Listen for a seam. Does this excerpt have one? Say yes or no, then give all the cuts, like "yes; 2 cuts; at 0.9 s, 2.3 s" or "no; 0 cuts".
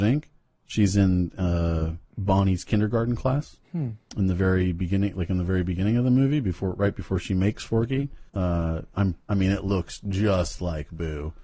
yes; 4 cuts; at 2.1 s, 3.6 s, 8.3 s, 9.2 s